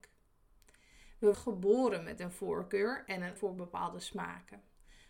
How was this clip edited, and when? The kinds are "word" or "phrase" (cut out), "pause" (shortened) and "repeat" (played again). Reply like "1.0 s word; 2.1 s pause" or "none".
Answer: 1.3 s word; 3.4 s word